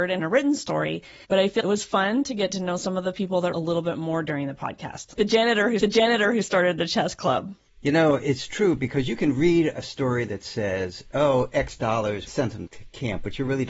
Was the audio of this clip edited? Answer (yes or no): yes